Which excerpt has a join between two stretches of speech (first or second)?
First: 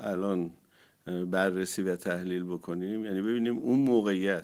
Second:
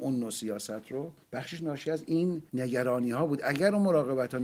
second